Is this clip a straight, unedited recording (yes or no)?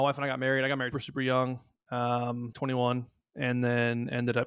no